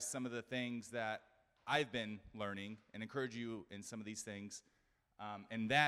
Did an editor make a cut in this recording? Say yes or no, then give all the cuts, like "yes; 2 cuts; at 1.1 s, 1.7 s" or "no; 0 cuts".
no; 0 cuts